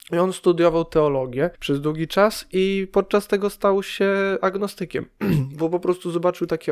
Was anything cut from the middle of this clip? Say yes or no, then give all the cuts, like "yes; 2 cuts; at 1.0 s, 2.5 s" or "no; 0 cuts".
yes; 1 cut; at 1.5 s